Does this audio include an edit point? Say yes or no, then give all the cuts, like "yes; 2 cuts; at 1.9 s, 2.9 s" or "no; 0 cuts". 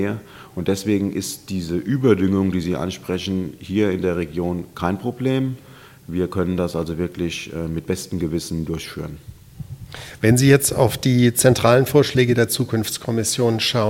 no; 0 cuts